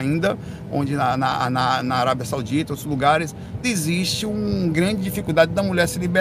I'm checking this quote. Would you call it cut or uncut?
cut